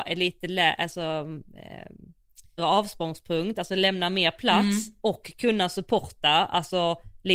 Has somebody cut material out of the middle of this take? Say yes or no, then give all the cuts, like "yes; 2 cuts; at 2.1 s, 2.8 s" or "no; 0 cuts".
yes; 1 cut; at 2.6 s